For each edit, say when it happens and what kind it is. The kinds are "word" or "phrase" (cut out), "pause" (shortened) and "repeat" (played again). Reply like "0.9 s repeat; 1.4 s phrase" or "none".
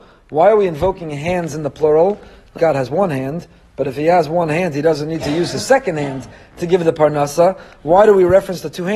2.6 s word